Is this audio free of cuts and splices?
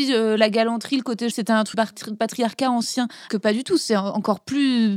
no; 3 cuts; at 1.3 s, 1.7 s, 3.3 s

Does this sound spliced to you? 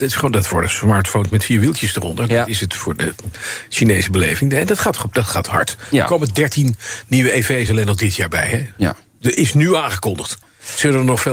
no; 0 cuts

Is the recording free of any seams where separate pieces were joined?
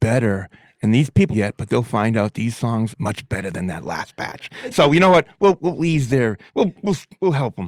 no; 4 cuts; at 1.3 s, 2.3 s, 2.9 s, 6.5 s

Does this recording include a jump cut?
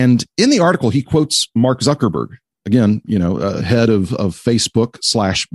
no; 0 cuts

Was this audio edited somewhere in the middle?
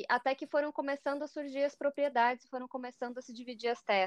no; 0 cuts

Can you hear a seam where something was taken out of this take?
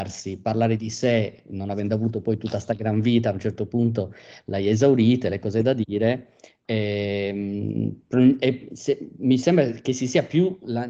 no; 0 cuts

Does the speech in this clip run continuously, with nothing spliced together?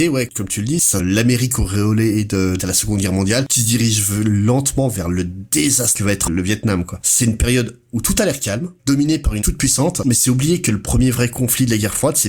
no; 5 cuts; at 1.0 s, 2.6 s, 6.3 s, 8.8 s, 9.4 s

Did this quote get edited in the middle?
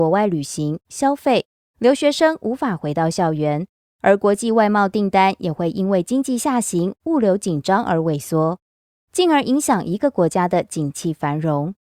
no; 0 cuts

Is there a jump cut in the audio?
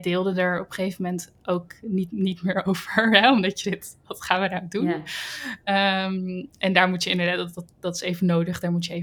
yes; 1 cut; at 3.6 s

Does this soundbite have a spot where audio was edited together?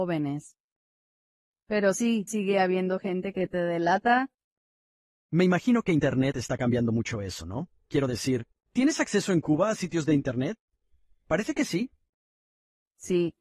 yes; 2 cuts; at 2.3 s, 5.0 s

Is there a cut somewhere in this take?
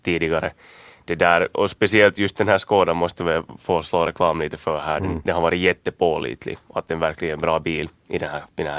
no; 0 cuts

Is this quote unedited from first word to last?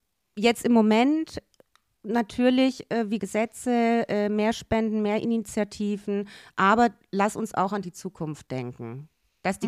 no; 1 cut; at 3.2 s

